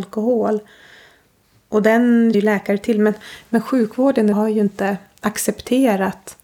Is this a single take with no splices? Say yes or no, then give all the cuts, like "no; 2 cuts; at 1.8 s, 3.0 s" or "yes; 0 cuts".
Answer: no; 2 cuts; at 2.3 s, 4.3 s